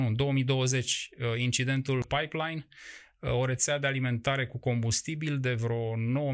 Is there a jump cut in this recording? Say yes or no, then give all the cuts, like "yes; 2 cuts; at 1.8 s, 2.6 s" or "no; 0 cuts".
yes; 1 cut; at 2.0 s